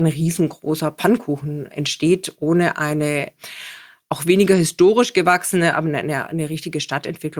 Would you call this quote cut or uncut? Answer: uncut